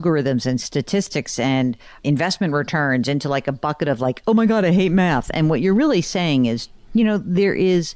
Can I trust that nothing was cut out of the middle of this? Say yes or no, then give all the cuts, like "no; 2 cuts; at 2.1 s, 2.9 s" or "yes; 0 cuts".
yes; 0 cuts